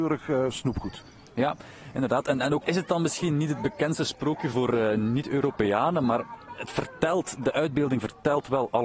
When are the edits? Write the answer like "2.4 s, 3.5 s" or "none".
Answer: 2.6 s, 4.5 s